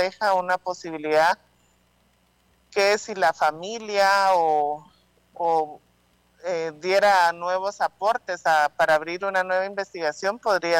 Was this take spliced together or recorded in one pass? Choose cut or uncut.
uncut